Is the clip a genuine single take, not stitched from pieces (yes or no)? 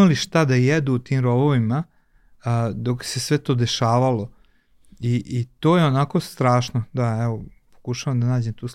yes